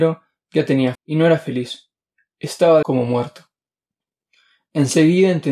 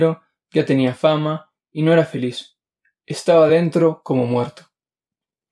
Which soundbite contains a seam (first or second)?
first